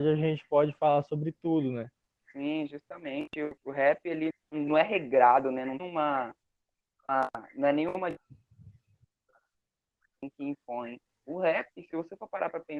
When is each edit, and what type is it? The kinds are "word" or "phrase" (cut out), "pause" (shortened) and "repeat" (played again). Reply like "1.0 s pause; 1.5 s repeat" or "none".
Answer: 3.6 s pause; 4.3 s word; 5.8 s word

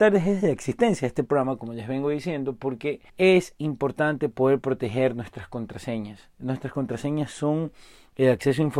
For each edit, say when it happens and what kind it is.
3.1 s pause

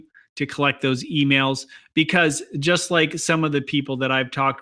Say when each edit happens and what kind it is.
none

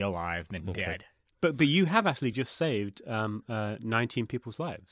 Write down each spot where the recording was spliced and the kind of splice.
none

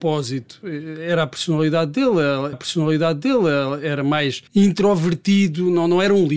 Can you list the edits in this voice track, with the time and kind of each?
2.5 s repeat; 4.5 s pause

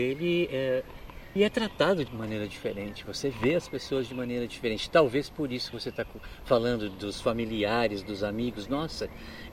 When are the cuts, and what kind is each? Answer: 1.4 s word; 2.1 s word; 5.7 s word

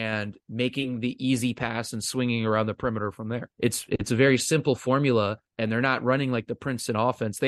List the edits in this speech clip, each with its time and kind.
3.5 s pause; 5.5 s pause

